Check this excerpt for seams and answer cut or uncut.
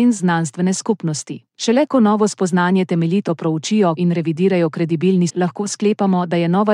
cut